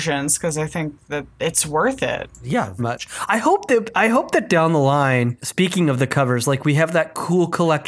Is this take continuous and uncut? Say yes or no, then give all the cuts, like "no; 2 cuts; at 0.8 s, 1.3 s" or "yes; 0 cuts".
no; 1 cut; at 2.8 s